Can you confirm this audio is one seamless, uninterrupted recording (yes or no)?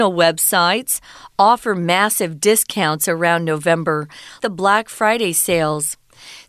no